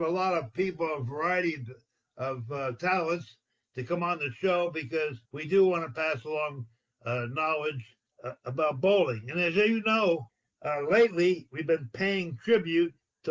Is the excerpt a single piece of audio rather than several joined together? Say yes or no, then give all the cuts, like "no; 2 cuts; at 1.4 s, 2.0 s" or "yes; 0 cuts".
no; 1 cut; at 5.3 s